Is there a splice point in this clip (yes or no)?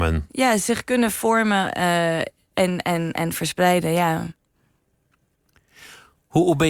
no